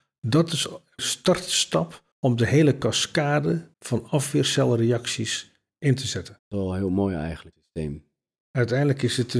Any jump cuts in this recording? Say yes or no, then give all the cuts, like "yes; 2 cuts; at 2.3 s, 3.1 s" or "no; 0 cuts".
yes; 5 cuts; at 1.0 s, 2.1 s, 3.7 s, 6.4 s, 7.5 s